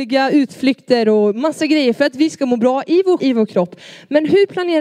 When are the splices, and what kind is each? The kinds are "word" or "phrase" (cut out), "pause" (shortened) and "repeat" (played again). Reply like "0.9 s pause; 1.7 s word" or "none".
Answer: 3.2 s word